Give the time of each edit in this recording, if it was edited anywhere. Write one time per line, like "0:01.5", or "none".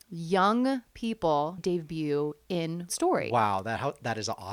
0:01.6
0:02.9